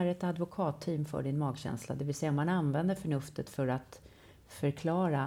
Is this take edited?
no; 0 cuts

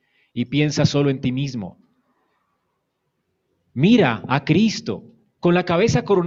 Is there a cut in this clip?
no; 0 cuts

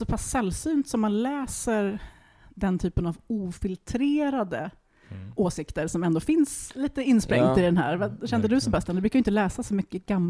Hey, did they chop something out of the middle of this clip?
no; 0 cuts

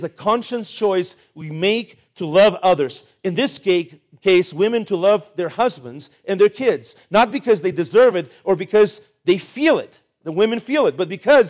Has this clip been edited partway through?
no; 0 cuts

